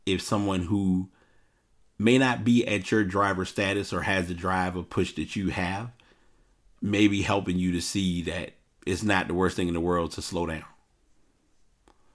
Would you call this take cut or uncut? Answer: uncut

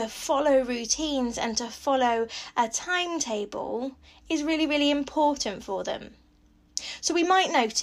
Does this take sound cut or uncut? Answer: uncut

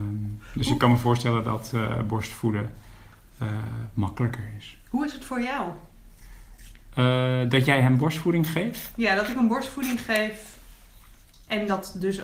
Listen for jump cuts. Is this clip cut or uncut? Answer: uncut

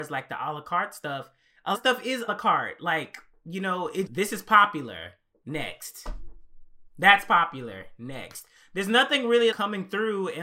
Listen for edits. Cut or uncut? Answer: cut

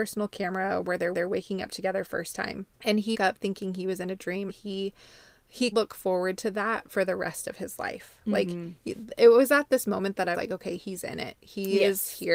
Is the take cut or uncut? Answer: cut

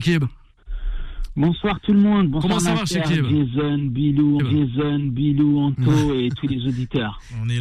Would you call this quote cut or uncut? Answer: cut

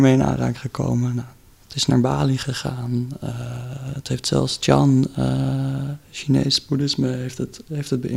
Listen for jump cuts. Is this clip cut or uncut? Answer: uncut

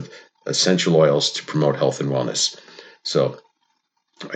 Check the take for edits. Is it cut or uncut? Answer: uncut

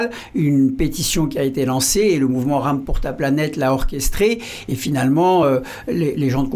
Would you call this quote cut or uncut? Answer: uncut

